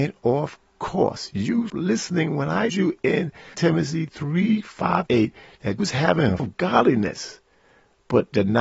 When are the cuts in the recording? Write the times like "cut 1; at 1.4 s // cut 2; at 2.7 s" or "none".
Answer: cut 1; at 1.7 s // cut 2; at 2.7 s // cut 3; at 3.5 s // cut 4; at 5.1 s // cut 5; at 5.8 s // cut 6; at 6.4 s